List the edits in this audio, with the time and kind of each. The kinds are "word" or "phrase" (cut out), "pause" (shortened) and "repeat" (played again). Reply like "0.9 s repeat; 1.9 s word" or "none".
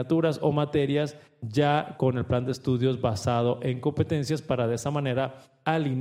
none